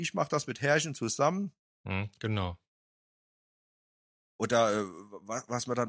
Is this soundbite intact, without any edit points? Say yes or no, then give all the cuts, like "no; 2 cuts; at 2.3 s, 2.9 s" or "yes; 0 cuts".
yes; 0 cuts